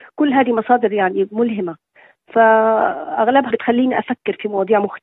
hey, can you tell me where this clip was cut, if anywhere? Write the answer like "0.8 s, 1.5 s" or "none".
3.5 s